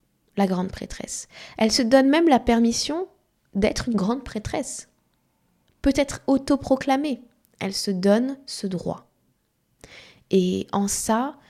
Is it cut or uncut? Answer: uncut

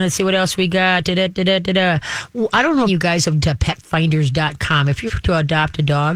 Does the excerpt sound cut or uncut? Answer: cut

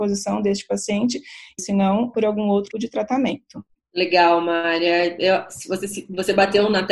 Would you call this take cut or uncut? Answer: cut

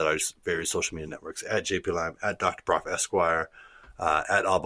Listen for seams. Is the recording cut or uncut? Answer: uncut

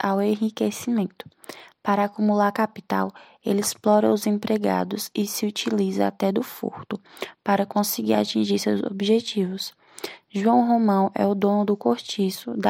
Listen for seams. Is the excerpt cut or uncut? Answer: uncut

